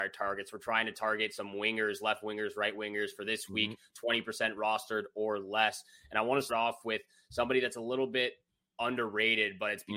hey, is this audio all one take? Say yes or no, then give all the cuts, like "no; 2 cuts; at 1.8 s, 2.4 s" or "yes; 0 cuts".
no; 1 cut; at 6.5 s